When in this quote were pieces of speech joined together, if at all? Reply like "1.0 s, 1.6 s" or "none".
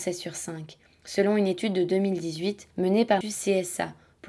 2.7 s, 3.2 s